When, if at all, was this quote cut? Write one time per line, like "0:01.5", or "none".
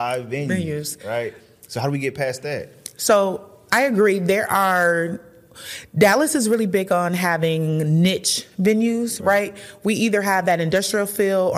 none